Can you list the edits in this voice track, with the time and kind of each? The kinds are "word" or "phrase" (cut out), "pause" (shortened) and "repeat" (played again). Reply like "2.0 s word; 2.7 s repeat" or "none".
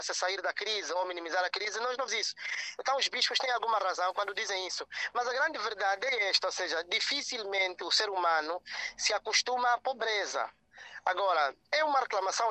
2.1 s word

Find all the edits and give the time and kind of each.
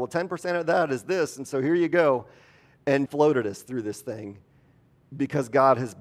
3.1 s word

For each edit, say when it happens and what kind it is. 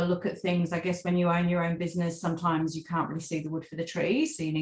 none

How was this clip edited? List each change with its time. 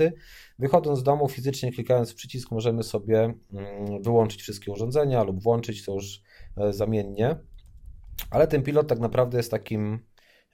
none

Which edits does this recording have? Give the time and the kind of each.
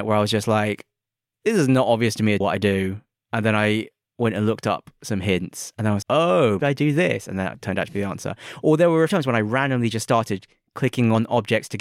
2.4 s word; 6.0 s word; 6.6 s word; 9.1 s word

